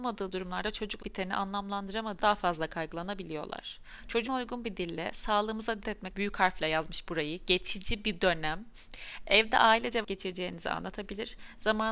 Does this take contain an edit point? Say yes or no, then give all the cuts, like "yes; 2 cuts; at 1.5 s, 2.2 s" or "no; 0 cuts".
yes; 6 cuts; at 1.0 s, 2.2 s, 4.3 s, 5.8 s, 6.1 s, 10.0 s